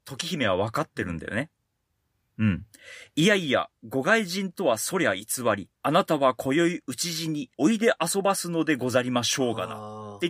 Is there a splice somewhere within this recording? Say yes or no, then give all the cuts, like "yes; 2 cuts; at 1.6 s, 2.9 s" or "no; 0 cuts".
yes; 2 cuts; at 5.8 s, 7.5 s